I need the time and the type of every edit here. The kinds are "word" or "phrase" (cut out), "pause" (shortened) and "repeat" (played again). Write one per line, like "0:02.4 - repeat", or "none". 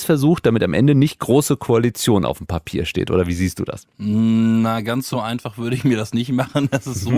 none